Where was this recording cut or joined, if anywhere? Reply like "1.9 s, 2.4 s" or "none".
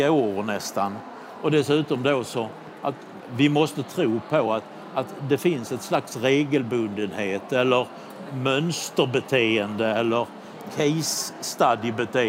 none